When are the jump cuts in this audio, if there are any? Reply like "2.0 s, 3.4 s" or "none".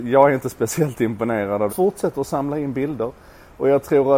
1.7 s